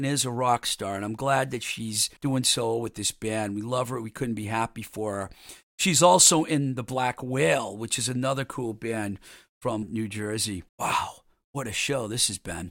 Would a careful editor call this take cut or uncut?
cut